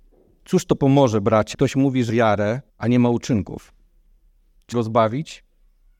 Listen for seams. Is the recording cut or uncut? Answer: cut